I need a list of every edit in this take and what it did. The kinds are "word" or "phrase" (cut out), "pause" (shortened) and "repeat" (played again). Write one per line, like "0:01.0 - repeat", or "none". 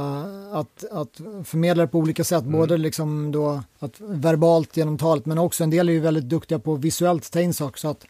0:03.7 - pause